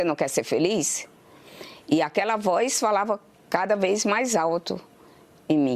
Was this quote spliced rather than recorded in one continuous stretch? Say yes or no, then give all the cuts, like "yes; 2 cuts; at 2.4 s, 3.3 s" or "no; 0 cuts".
no; 0 cuts